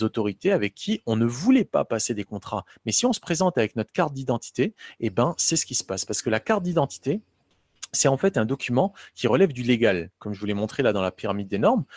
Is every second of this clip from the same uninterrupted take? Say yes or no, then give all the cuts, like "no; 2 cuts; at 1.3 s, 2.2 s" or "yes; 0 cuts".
yes; 0 cuts